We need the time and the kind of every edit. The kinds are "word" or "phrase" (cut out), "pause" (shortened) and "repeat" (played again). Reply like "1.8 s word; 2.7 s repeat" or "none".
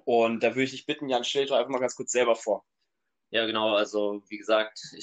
none